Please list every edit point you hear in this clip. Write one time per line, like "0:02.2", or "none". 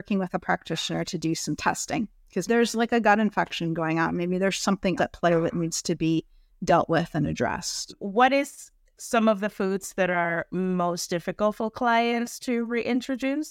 0:02.5
0:05.0